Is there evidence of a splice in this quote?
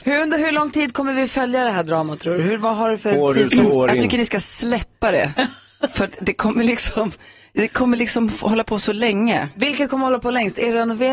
no; 0 cuts

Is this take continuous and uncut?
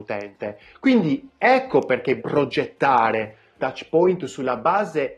no; 2 cuts; at 2.2 s, 3.6 s

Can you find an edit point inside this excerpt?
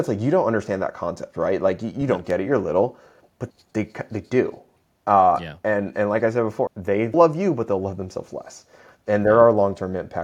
yes; 3 cuts; at 3.5 s, 6.7 s, 7.1 s

